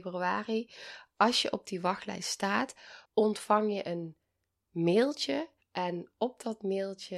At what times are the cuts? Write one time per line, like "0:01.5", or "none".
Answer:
0:03.1
0:05.6